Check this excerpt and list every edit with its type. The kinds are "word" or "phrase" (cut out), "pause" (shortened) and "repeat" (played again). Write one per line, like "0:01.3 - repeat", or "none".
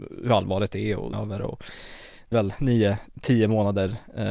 0:01.1 - word
0:02.3 - word